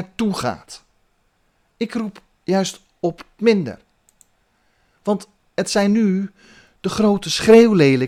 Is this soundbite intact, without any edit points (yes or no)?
no